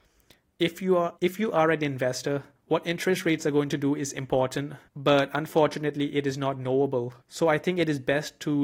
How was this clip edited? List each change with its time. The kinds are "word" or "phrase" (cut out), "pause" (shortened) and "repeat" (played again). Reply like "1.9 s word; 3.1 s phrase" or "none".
1.2 s pause; 2.6 s pause; 4.9 s pause; 7.2 s pause